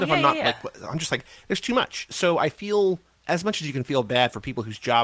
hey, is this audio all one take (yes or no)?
no